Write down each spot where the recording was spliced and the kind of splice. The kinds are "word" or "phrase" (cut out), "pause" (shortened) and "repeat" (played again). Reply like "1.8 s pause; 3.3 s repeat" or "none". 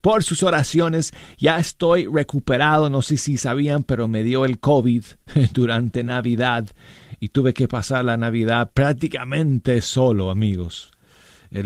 none